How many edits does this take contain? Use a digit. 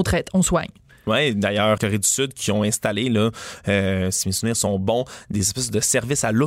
1